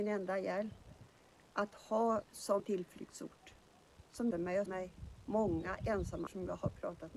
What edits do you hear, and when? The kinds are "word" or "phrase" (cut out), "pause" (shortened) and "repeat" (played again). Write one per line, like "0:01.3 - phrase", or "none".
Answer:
0:02.2 - word
0:02.6 - word
0:04.3 - word
0:04.7 - word
0:06.3 - word

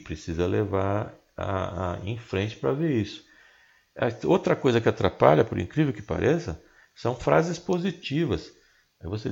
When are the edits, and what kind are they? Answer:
none

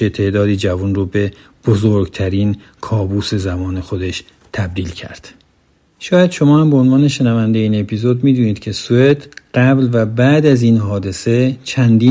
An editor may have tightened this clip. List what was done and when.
none

